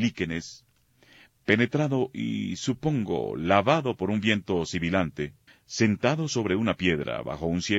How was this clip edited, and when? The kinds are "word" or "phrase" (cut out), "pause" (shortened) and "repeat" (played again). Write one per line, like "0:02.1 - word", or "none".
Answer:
0:05.5 - pause